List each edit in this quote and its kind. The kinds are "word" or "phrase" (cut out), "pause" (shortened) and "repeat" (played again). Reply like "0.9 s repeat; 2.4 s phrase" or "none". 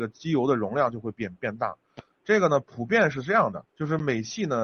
3.7 s pause